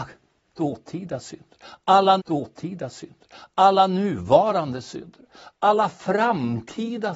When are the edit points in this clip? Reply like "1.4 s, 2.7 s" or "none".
2.2 s